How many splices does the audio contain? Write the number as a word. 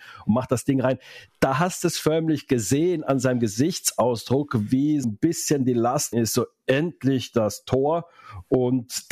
two